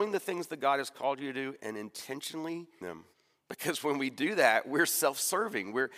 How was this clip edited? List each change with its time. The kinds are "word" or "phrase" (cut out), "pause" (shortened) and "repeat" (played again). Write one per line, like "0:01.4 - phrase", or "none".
0:02.8 - word
0:03.1 - pause